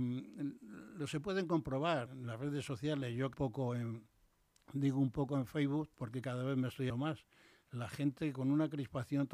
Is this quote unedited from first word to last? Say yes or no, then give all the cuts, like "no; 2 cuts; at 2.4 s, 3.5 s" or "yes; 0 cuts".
no; 4 cuts; at 2.1 s, 3.3 s, 5.9 s, 6.9 s